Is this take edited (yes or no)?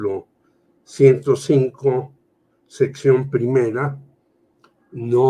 no